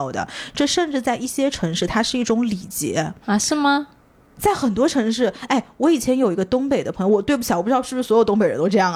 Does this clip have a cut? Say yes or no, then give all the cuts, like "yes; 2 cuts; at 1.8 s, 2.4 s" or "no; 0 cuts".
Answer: no; 0 cuts